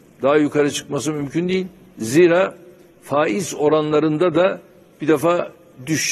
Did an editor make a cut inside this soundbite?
no; 0 cuts

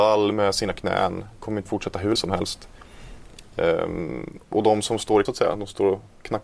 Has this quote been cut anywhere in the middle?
yes; 4 cuts; at 1.7 s, 2.2 s, 4.4 s, 5.2 s

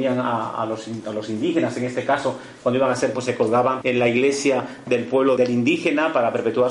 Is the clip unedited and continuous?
no; 3 cuts; at 3.1 s, 3.8 s, 5.4 s

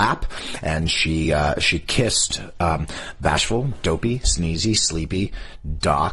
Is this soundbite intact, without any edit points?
yes; 0 cuts

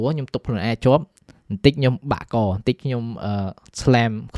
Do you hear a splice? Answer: no; 0 cuts

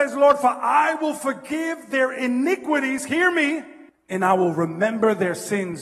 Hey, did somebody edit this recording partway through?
yes; 1 cut; at 3.9 s

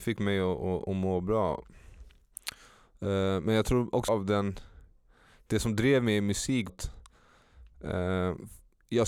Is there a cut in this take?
yes; 2 cuts; at 4.1 s, 6.7 s

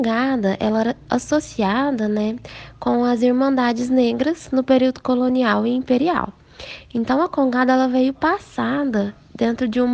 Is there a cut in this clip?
no; 0 cuts

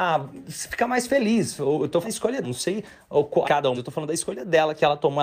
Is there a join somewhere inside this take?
yes; 4 cuts; at 2.0 s, 2.4 s, 3.4 s, 3.7 s

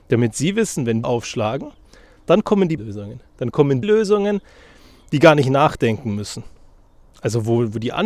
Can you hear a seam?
yes; 3 cuts; at 1.0 s, 2.8 s, 3.8 s

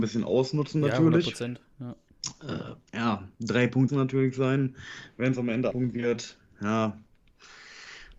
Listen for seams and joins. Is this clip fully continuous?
no; 4 cuts; at 2.9 s, 3.3 s, 3.9 s, 5.7 s

